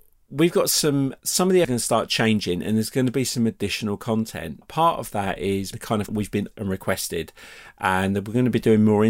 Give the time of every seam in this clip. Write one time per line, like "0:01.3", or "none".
0:01.2
0:01.6
0:04.6
0:05.7
0:06.1
0:06.5